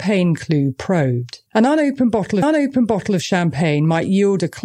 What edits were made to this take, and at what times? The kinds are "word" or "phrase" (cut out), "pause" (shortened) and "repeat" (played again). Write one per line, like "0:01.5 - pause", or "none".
0:01.5 - pause
0:02.4 - repeat